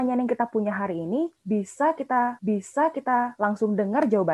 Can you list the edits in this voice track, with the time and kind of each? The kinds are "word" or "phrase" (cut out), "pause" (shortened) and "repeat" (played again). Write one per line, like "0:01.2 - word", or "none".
0:02.4 - repeat

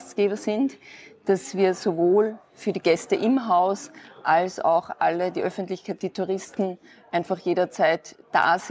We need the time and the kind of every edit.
none

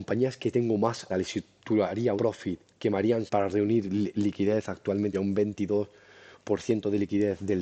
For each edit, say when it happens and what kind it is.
0:01.1 - word
0:02.2 - word
0:03.3 - word
0:05.1 - word

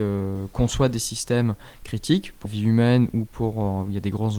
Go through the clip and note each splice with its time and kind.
0:02.5 - word

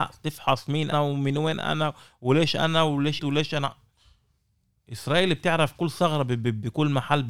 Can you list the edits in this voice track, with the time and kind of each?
0:00.9 - word
0:03.2 - word

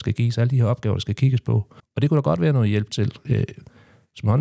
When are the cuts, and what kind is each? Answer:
0:01.8 - pause

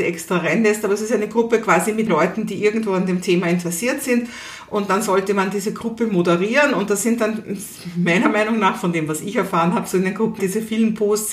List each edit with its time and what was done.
0:02.1 - word
0:10.4 - word

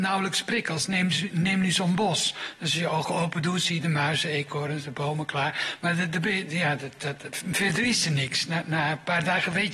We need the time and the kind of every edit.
none

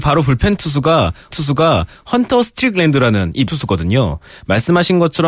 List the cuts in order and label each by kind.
0:01.3 - repeat
0:03.5 - phrase

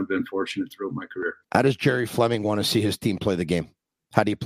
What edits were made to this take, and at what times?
0:01.4 - pause

